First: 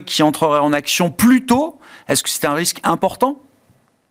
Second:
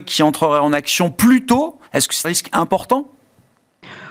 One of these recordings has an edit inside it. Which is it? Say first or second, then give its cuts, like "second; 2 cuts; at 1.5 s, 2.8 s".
second; 2 cuts; at 1.9 s, 2.2 s